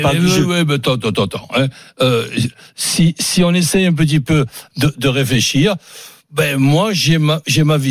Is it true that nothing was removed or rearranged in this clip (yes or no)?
yes